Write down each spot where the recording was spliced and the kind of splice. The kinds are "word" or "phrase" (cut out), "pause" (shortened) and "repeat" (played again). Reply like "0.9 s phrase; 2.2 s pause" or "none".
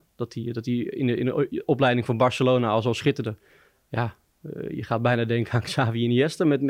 none

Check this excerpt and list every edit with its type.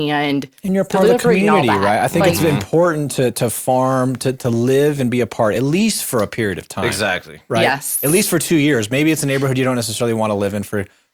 none

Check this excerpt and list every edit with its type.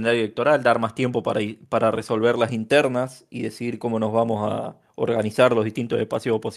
none

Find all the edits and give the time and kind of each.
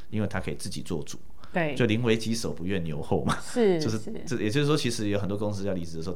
none

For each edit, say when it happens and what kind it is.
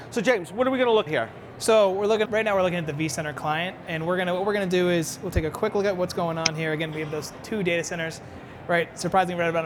1.1 s word; 2.2 s word

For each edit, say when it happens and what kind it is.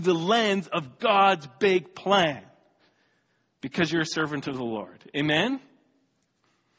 none

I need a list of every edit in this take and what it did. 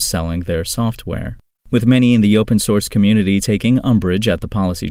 none

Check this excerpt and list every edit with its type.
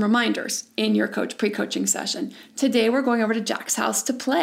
none

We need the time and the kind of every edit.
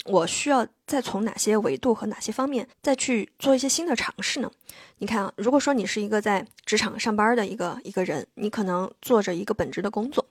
2.7 s pause

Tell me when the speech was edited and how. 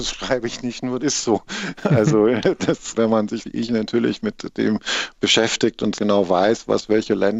1.0 s word; 3.4 s word; 6.0 s word

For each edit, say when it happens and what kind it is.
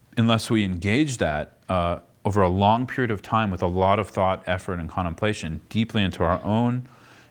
none

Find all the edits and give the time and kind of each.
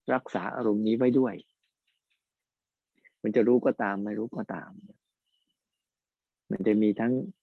none

